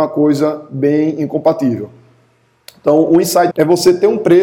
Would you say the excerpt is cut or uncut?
cut